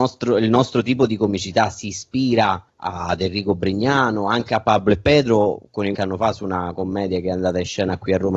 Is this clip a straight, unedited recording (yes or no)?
no